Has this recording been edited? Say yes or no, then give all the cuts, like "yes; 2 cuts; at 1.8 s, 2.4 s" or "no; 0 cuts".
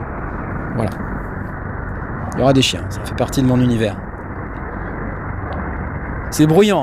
yes; 1 cut; at 3.0 s